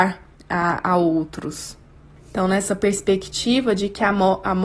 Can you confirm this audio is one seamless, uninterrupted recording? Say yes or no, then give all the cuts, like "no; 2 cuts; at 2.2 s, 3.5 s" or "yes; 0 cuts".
yes; 0 cuts